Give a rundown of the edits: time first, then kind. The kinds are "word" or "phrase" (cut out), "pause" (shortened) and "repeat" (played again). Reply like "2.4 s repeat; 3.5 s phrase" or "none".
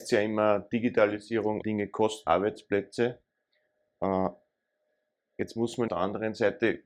1.6 s phrase; 2.3 s word; 5.9 s phrase